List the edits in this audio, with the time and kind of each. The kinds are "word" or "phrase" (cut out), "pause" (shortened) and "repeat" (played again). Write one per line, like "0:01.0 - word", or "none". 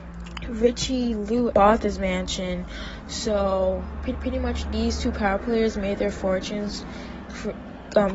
0:01.5 - word
0:04.1 - repeat